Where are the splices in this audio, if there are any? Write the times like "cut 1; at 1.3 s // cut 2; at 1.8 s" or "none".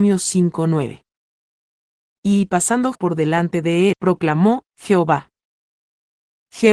cut 1; at 2.9 s // cut 2; at 3.9 s